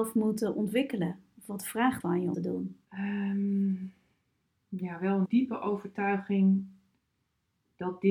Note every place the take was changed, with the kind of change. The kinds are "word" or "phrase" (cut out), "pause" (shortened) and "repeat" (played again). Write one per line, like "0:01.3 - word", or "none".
0:02.0 - word
0:02.3 - phrase
0:02.8 - pause
0:05.3 - word